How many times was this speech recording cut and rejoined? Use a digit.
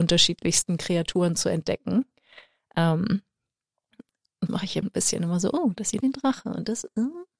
3